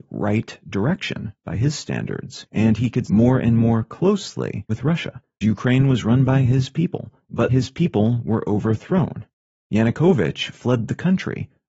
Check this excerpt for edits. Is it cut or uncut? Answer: cut